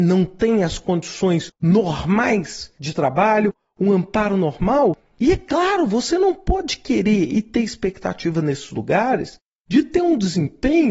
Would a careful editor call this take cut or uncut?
uncut